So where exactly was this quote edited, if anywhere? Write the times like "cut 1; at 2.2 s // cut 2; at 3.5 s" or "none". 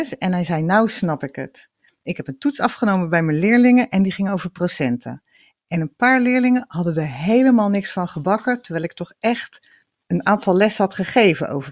none